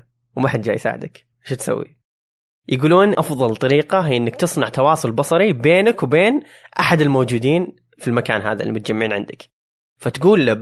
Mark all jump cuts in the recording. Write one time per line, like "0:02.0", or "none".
0:01.3
0:03.1